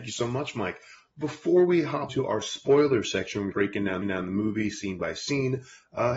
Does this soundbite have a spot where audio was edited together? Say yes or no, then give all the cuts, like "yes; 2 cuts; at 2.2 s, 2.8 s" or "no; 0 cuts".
yes; 3 cuts; at 2.1 s, 3.5 s, 4.0 s